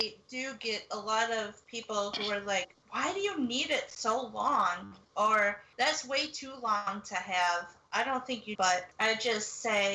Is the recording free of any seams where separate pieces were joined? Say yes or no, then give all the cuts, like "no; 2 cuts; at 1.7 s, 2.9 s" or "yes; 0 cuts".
no; 3 cuts; at 2.8 s, 5.0 s, 8.5 s